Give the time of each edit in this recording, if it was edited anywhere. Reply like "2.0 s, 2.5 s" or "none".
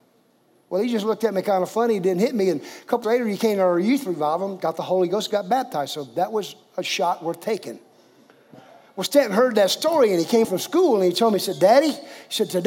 3.0 s, 10.4 s